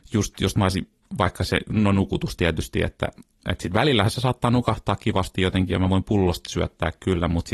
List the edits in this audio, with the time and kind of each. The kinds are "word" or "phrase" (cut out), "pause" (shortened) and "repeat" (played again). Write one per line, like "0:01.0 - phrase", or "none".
none